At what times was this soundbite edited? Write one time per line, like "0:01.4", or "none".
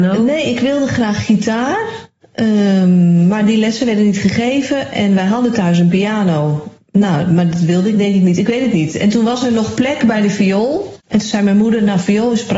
0:06.8
0:11.0